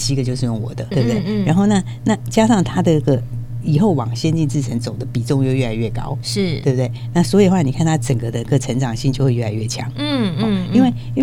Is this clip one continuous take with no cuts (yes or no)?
no